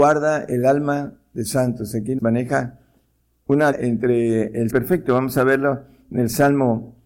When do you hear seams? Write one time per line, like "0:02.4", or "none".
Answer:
0:01.5
0:02.2
0:03.7
0:04.7